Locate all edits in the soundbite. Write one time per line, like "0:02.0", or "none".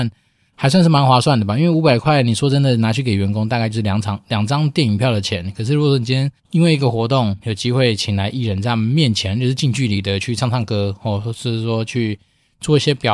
0:06.4